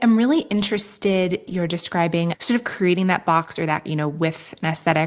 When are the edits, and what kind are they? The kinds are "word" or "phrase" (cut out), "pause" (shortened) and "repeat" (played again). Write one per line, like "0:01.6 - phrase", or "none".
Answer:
0:01.5 - phrase
0:02.3 - word
0:03.9 - word